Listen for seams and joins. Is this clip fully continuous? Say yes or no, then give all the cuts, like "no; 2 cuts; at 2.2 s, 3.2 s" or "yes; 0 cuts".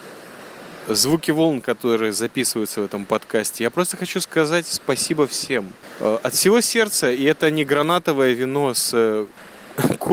yes; 0 cuts